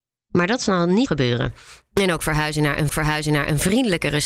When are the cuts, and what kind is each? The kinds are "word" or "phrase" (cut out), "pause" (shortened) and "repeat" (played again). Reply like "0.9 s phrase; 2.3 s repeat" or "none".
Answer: 1.1 s word; 2.9 s repeat